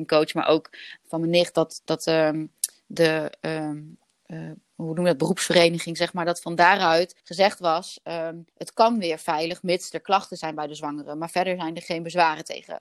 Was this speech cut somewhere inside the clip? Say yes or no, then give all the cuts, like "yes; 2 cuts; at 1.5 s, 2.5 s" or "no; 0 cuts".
yes; 2 cuts; at 7.2 s, 8.5 s